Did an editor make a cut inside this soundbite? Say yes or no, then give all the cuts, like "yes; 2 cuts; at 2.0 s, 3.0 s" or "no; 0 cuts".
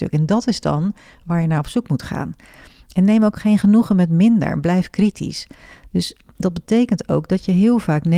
no; 0 cuts